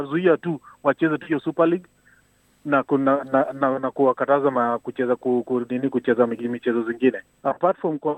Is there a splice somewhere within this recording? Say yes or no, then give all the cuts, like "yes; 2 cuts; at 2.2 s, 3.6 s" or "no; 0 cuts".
no; 0 cuts